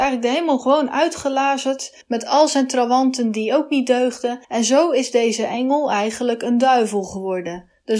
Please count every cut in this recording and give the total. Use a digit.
2